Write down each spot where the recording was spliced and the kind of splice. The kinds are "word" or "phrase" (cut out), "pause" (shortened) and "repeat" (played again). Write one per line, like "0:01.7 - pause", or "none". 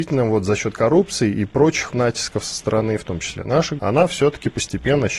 0:01.9 - word
0:03.8 - word